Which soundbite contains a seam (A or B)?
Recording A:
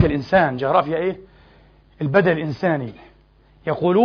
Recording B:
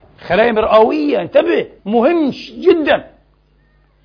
B